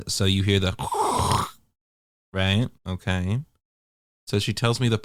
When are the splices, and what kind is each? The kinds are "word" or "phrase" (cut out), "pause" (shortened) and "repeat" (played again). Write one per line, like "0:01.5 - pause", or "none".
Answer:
0:02.7 - pause

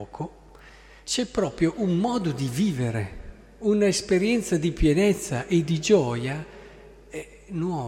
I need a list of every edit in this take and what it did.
0:01.0 - word

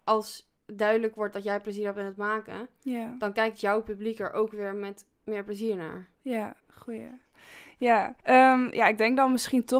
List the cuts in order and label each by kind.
0:06.6 - pause
0:08.2 - pause

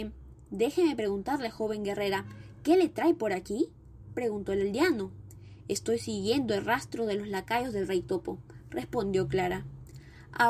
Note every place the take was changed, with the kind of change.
none

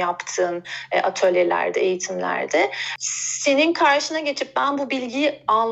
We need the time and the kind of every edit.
none

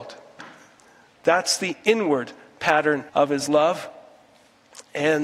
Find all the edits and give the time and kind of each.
0:03.1 - pause

